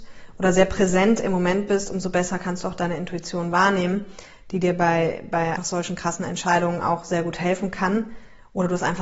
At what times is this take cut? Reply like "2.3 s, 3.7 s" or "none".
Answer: 5.6 s